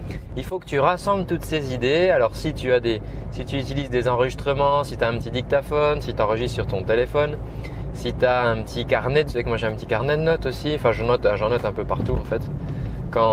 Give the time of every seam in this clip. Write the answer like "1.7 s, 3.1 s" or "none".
9.3 s